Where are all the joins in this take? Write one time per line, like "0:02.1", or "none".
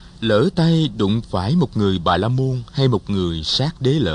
none